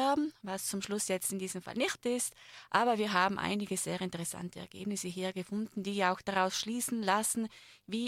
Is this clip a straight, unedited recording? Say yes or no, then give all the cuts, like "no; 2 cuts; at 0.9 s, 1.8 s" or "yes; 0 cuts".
no; 1 cut; at 2.0 s